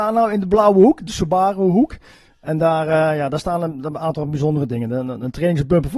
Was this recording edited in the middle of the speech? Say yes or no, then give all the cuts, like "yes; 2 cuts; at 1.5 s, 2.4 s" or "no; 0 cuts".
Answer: no; 0 cuts